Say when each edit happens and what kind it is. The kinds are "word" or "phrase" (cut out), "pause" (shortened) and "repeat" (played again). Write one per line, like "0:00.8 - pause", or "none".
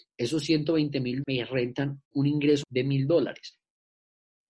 0:01.2 - word
0:02.0 - pause
0:02.6 - word

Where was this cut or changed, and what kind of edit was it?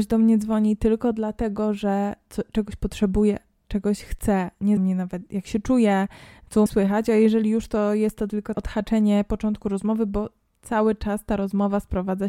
0:04.8 - word
0:06.7 - word
0:08.5 - word

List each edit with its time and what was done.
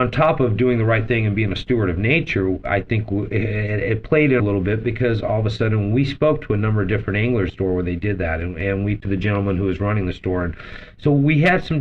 0:04.4 - phrase
0:07.5 - phrase
0:09.0 - word

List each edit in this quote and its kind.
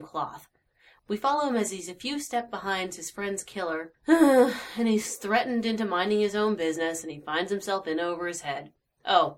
none

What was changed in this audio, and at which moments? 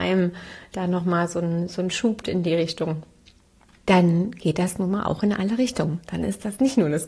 0:02.2 - word

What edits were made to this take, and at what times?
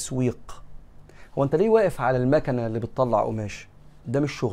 none

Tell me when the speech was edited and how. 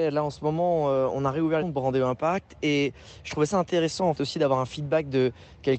0:01.6 - phrase
0:04.1 - word

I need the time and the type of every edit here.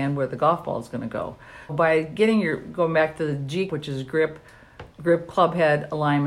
0:01.7 - word
0:03.7 - word
0:04.9 - pause

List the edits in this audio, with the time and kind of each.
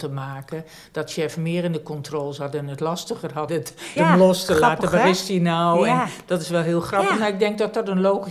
0:03.5 - word
0:04.0 - word

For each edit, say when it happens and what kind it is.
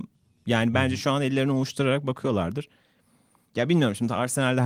none

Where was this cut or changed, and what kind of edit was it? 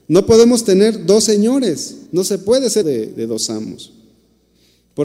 0:02.1 - pause
0:02.8 - word

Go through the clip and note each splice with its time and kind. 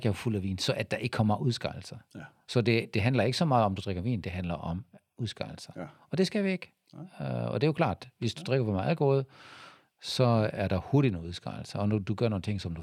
none

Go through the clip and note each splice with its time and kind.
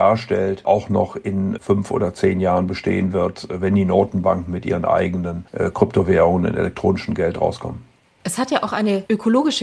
none

